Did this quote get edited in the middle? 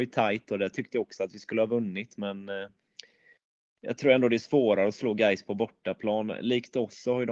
no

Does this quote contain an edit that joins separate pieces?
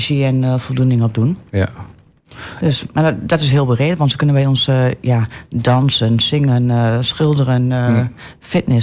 no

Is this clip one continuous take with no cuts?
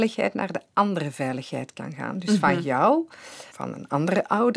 no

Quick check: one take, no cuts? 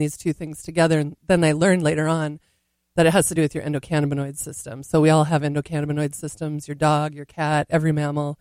yes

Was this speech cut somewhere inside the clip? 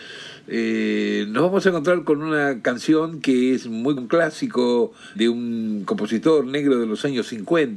yes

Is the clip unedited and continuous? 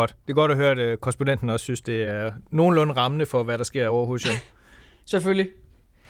yes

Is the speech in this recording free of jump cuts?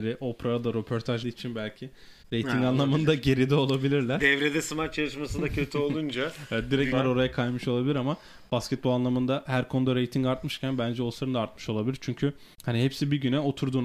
no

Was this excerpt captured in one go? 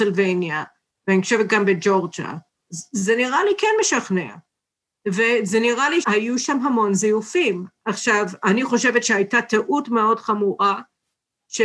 no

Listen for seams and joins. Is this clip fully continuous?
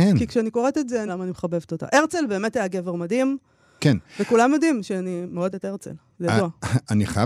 no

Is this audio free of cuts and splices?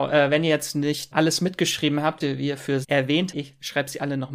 no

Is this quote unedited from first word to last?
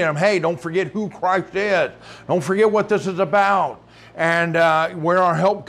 yes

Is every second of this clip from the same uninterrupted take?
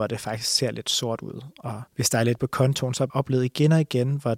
no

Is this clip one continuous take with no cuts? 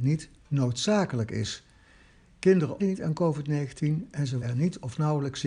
no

